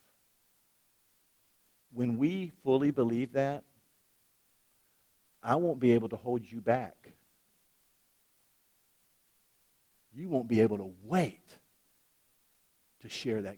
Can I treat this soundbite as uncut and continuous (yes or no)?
yes